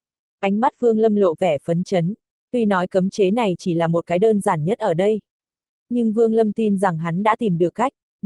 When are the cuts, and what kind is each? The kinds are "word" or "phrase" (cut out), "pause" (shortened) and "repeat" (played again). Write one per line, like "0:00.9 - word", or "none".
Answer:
none